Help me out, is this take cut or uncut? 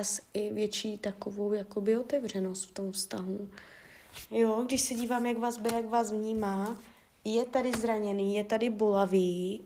uncut